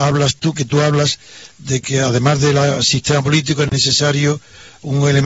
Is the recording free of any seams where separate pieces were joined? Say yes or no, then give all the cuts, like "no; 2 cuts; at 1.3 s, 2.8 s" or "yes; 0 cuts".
yes; 0 cuts